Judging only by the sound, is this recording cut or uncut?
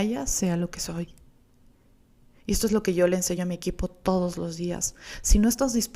uncut